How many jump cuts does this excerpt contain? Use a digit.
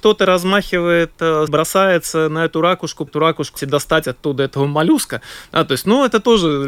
3